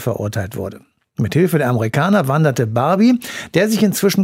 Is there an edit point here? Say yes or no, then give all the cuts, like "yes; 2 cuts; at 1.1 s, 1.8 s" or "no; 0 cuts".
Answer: no; 0 cuts